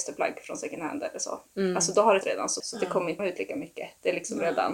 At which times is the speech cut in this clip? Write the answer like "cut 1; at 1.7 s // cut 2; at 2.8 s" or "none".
cut 1; at 2.2 s // cut 2; at 2.6 s // cut 3; at 3.2 s